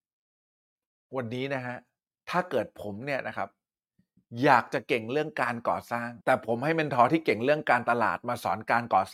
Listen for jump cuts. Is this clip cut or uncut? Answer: cut